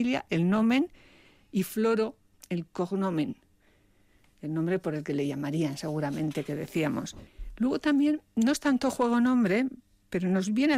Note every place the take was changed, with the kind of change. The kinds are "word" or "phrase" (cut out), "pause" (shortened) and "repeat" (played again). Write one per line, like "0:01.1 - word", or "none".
0:02.3 - pause
0:08.3 - pause